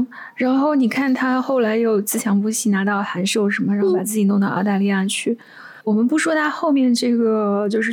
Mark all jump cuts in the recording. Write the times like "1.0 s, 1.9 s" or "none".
5.8 s